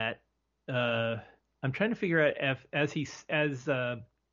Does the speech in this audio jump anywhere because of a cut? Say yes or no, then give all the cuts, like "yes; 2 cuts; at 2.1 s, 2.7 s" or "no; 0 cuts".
yes; 1 cut; at 1.4 s